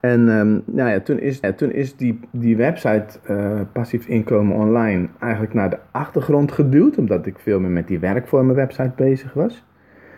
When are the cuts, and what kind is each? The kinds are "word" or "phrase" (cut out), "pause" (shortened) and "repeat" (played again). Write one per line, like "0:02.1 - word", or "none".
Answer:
0:01.4 - repeat